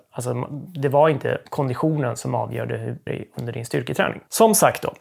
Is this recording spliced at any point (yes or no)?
yes